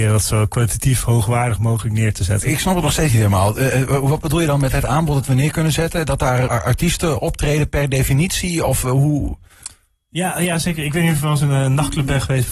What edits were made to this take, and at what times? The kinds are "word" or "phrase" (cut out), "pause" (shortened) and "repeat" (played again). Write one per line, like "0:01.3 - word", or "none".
0:06.5 - word

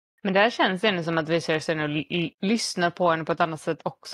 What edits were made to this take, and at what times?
0:02.3 - pause

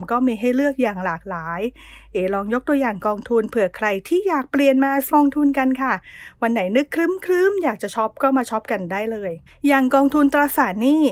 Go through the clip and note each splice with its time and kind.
0:05.1 - word
0:09.5 - pause

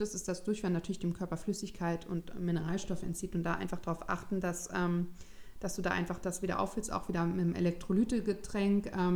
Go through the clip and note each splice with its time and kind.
none

